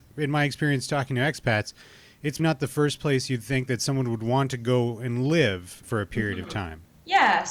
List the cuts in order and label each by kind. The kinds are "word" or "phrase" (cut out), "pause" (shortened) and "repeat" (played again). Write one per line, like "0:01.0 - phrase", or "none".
0:02.4 - word
0:05.8 - word